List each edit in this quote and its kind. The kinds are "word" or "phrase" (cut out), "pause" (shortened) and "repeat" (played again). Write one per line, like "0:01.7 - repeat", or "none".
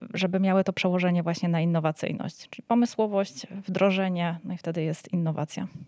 none